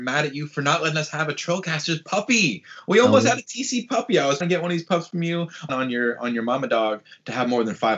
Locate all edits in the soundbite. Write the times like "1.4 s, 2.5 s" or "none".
4.4 s, 5.7 s